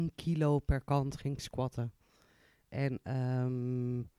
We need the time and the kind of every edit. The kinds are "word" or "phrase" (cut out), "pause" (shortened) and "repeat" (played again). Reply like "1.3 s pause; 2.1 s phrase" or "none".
none